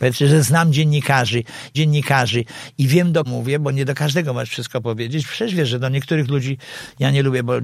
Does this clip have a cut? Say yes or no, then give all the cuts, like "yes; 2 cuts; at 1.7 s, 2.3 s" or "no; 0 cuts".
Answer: yes; 2 cuts; at 1.7 s, 3.2 s